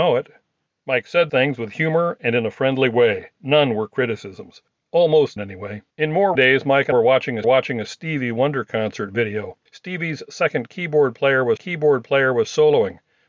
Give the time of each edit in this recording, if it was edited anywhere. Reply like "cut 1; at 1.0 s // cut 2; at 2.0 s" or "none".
cut 1; at 1.3 s // cut 2; at 3.3 s // cut 3; at 5.4 s // cut 4; at 5.9 s // cut 5; at 6.3 s // cut 6; at 6.9 s // cut 7; at 7.4 s // cut 8; at 11.6 s